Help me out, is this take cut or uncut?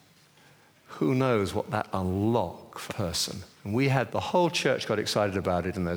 cut